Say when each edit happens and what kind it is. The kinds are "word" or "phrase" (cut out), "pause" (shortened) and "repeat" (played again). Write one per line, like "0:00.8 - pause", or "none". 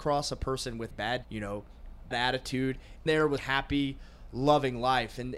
0:00.9 - word
0:01.2 - word
0:02.1 - word
0:03.1 - word
0:03.4 - word